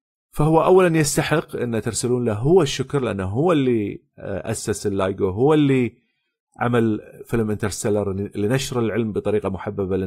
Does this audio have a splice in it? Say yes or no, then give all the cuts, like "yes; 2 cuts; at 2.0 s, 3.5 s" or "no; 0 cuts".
no; 0 cuts